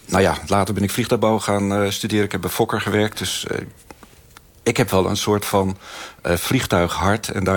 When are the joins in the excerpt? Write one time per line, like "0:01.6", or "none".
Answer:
none